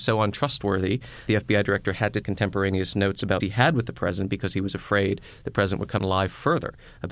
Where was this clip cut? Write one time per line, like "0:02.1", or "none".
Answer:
0:01.3
0:02.2
0:03.4
0:06.0

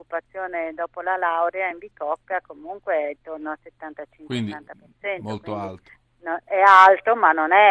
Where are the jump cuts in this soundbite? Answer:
none

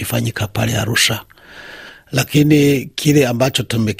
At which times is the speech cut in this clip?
none

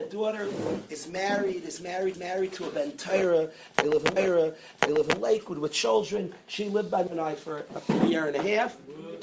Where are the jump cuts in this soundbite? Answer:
0:02.1
0:04.2
0:07.1

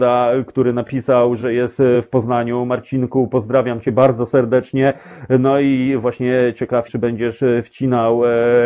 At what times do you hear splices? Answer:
0:06.9

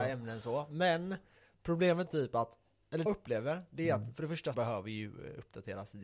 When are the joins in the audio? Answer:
0:02.1
0:03.1
0:04.5

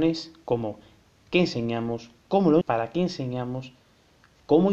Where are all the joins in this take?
0:02.6

